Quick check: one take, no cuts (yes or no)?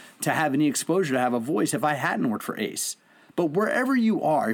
yes